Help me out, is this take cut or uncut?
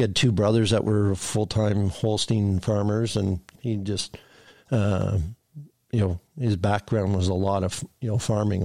cut